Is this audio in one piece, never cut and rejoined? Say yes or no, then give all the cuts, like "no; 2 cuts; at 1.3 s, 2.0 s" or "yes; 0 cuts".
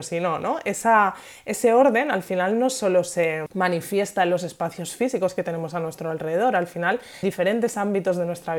no; 1 cut; at 7.2 s